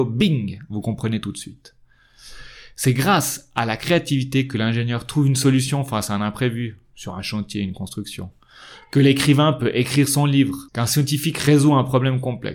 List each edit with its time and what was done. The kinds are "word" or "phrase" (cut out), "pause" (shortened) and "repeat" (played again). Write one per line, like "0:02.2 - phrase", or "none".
0:10.7 - pause

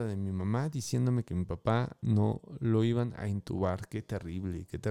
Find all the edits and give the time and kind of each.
none

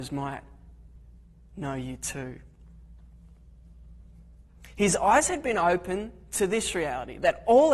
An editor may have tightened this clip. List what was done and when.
none

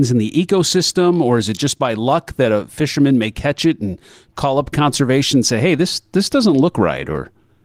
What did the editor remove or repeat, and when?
none

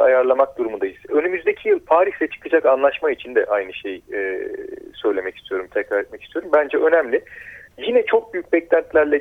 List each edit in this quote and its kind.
0:07.7 - pause

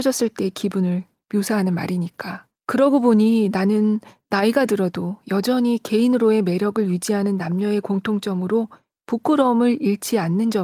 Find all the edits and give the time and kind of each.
0:02.6 - pause

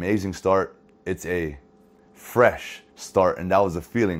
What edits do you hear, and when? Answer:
0:02.9 - pause

